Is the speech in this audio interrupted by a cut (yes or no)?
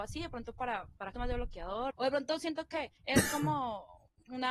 yes